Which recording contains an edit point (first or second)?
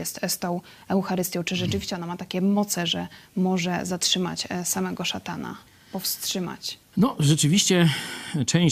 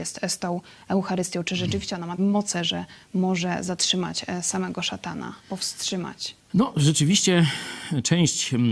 second